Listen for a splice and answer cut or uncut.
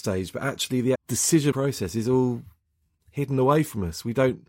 cut